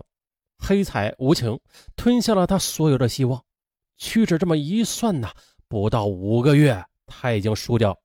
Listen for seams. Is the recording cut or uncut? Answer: uncut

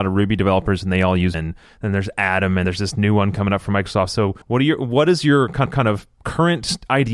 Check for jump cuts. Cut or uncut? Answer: cut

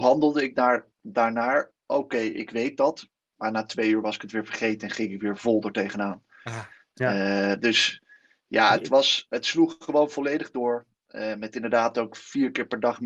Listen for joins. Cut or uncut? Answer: uncut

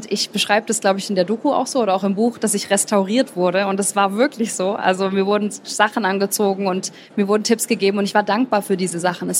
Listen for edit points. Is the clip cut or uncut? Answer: cut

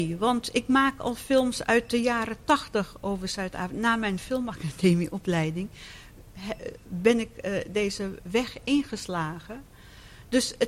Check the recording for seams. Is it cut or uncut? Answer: uncut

